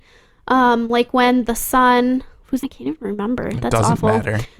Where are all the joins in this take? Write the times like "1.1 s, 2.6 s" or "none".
2.6 s